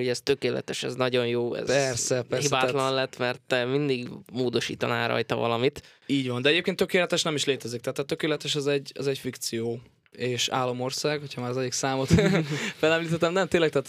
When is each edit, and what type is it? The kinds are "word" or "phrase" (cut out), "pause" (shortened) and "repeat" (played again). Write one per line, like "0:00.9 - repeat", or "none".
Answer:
none